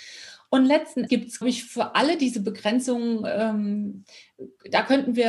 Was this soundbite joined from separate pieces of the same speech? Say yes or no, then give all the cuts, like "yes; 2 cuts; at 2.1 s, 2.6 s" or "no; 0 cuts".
yes; 2 cuts; at 1.1 s, 1.4 s